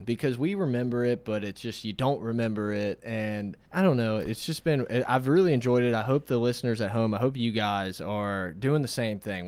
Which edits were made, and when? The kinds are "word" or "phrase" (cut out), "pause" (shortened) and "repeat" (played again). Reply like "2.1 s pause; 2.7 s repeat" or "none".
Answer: 3.6 s pause